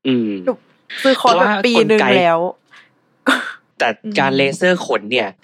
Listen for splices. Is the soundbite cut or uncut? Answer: cut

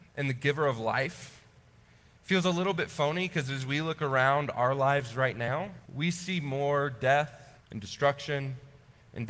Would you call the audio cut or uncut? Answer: cut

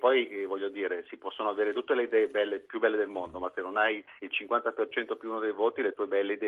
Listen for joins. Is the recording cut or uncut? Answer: cut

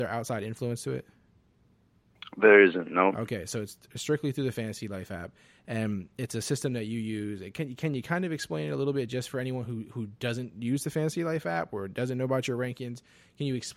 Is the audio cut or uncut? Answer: uncut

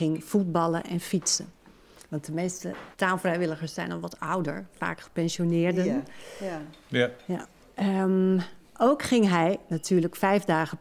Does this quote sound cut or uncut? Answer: cut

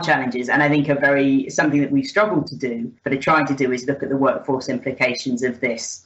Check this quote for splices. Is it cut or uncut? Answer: cut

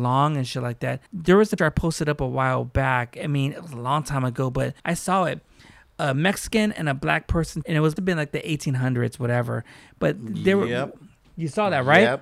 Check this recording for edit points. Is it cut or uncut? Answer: cut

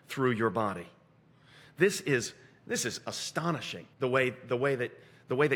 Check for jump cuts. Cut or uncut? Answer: cut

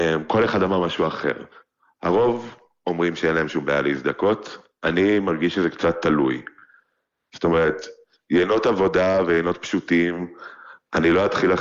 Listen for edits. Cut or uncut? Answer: uncut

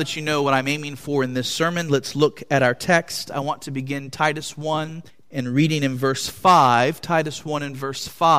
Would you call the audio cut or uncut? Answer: cut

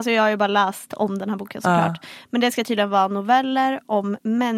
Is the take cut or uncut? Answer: uncut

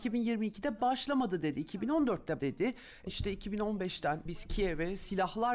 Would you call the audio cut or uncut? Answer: cut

